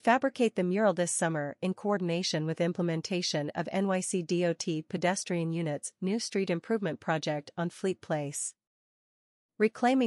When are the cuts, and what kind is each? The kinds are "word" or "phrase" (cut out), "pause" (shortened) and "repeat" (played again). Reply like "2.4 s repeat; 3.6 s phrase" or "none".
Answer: none